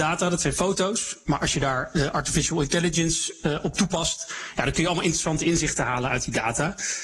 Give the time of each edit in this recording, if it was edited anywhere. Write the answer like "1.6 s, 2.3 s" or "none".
none

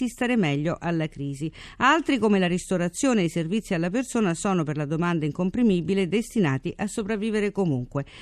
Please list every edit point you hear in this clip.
none

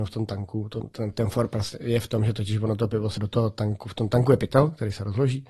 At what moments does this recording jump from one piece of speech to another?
3.2 s

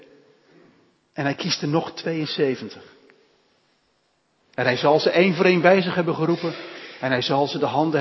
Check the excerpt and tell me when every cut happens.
none

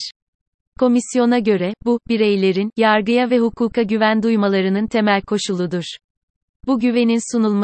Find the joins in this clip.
none

